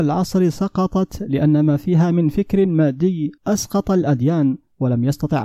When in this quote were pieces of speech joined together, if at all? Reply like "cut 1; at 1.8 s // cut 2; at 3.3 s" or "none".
cut 1; at 3.4 s